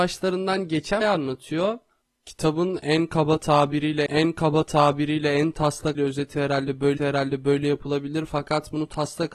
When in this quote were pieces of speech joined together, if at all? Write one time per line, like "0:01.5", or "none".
0:01.0
0:04.1
0:05.9
0:07.0